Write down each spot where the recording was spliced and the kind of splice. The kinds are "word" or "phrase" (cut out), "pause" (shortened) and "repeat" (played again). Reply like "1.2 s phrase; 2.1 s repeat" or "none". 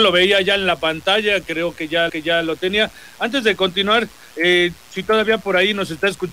2.1 s repeat